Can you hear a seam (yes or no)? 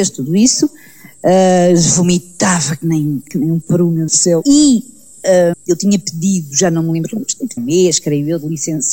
yes